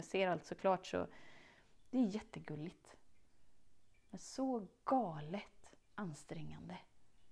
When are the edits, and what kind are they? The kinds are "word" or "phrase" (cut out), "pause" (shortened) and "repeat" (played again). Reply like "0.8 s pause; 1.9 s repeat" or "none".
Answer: 4.0 s pause; 5.8 s pause